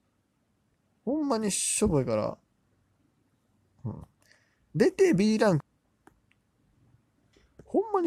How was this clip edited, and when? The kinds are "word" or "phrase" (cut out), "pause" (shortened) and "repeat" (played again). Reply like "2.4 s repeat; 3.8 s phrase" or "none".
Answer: none